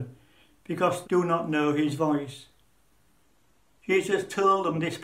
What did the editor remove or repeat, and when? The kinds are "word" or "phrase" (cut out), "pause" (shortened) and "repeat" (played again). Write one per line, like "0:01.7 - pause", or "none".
0:01.0 - word